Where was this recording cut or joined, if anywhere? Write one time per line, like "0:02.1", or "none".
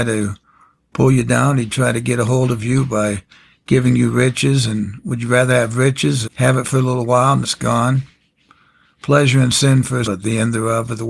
0:06.2
0:07.4
0:10.0